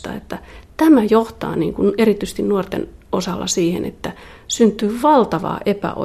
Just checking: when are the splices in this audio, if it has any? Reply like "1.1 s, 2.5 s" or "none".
none

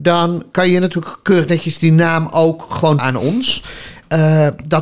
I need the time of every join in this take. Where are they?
3.0 s

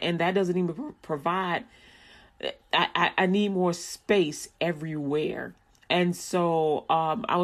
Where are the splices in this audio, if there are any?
none

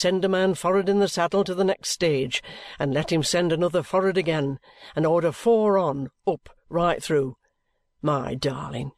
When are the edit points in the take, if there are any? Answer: none

